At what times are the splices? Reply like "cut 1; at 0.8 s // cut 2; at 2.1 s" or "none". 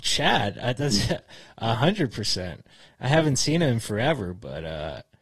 none